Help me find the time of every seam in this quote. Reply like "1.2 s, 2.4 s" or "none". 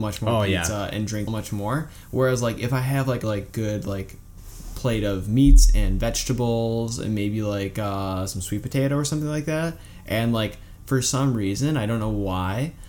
1.3 s, 3.2 s